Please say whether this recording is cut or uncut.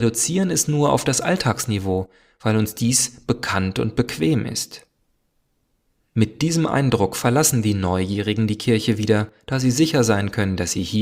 uncut